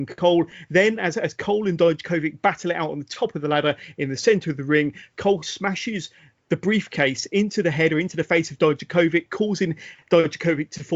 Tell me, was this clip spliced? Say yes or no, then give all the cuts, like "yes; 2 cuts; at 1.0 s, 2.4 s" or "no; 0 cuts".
no; 0 cuts